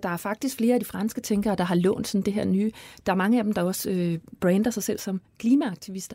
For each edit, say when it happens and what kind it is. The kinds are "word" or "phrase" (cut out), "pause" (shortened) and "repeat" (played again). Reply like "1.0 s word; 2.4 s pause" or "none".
none